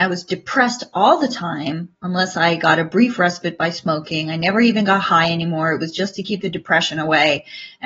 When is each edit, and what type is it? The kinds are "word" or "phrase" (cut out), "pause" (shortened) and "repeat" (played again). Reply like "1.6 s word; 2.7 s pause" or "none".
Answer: none